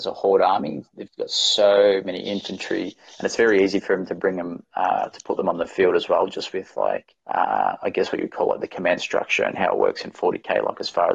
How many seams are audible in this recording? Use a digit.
2